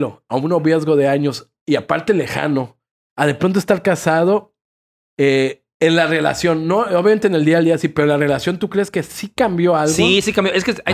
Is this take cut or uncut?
uncut